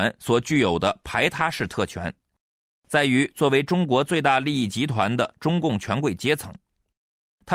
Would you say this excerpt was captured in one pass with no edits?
yes; 0 cuts

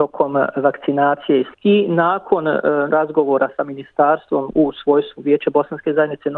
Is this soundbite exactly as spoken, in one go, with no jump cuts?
no; 2 cuts; at 1.5 s, 2.9 s

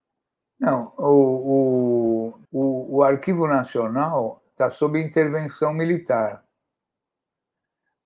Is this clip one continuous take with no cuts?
no; 1 cut; at 2.4 s

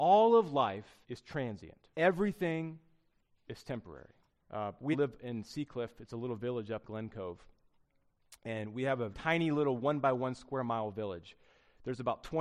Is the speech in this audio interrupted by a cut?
yes; 6 cuts; at 1.0 s, 1.9 s, 4.3 s, 4.9 s, 6.8 s, 9.1 s

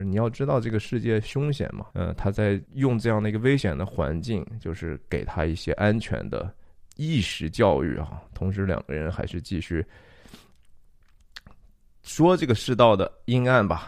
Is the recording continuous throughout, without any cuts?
no; 3 cuts; at 1.9 s, 2.7 s, 6.9 s

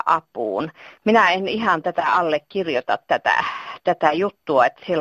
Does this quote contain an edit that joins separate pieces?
no; 0 cuts

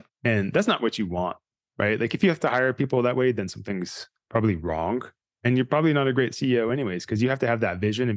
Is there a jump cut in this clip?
no; 0 cuts

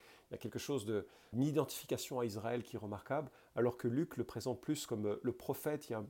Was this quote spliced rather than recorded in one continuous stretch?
yes; 1 cut; at 1.3 s

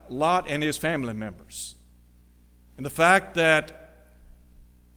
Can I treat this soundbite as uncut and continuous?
yes; 0 cuts

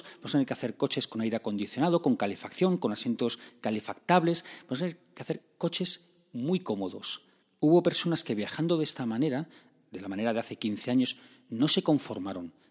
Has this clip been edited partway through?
no; 0 cuts

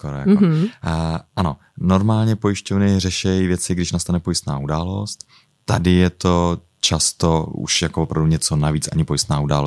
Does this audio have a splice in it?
no; 0 cuts

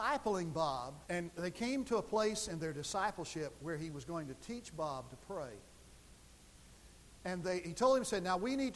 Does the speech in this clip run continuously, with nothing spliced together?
no; 1 cut; at 1.1 s

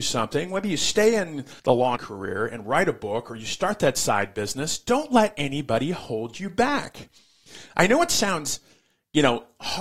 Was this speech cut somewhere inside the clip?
yes; 2 cuts; at 1.6 s, 2.0 s

